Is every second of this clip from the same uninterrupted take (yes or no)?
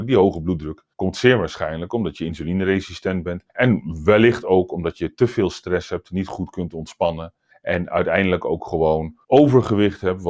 no